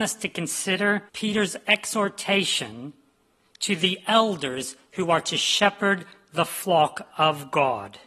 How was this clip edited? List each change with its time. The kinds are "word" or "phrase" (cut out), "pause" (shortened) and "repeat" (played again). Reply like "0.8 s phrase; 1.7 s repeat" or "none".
1.1 s pause